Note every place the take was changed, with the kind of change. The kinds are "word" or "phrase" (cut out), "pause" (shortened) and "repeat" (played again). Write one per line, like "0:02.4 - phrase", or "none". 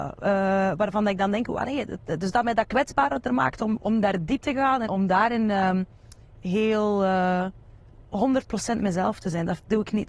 0:03.8 - word
0:04.4 - word
0:04.8 - word